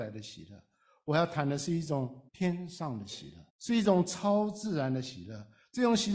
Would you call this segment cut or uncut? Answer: cut